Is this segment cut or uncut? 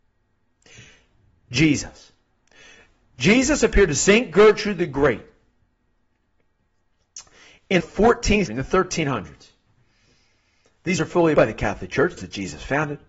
cut